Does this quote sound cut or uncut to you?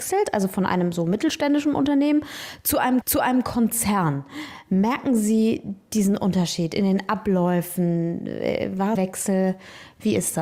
cut